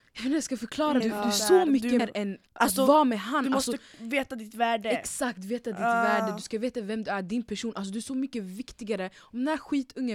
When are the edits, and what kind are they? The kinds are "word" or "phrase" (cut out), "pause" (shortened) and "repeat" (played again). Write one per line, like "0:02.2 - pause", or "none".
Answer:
0:01.0 - word
0:02.0 - word
0:02.5 - pause